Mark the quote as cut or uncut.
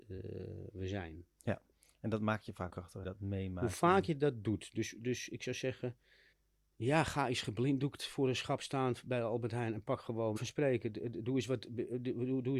cut